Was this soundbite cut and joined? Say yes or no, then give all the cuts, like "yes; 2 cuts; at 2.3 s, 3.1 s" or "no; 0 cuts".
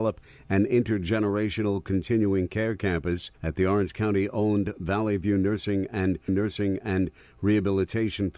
yes; 2 cuts; at 3.4 s, 6.3 s